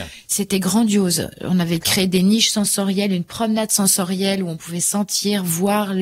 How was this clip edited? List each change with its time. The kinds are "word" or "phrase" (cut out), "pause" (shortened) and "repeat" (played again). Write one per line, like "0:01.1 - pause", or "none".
none